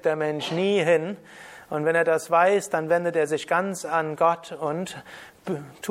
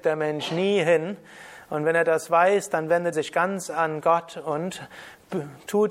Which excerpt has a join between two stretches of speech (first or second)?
second